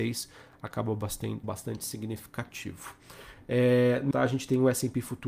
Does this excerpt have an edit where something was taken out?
yes; 2 cuts; at 1.4 s, 4.1 s

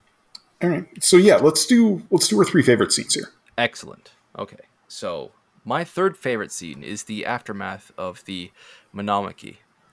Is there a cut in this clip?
no; 0 cuts

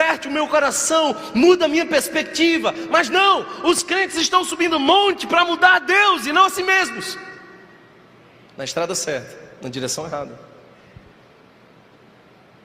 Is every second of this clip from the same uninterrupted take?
yes; 0 cuts

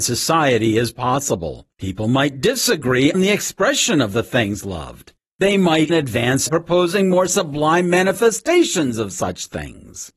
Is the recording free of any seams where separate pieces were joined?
no; 5 cuts; at 1.7 s, 3.1 s, 5.2 s, 5.9 s, 6.5 s

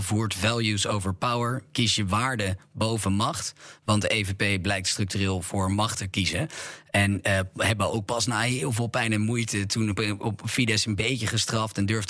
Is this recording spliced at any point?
no; 0 cuts

